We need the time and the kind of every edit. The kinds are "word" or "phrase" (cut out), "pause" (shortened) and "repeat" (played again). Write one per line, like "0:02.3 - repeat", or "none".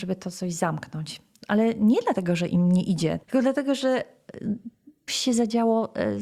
0:03.2 - pause
0:05.1 - word